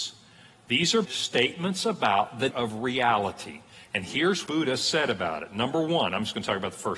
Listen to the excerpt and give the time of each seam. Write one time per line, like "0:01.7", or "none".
0:01.0
0:02.5
0:04.5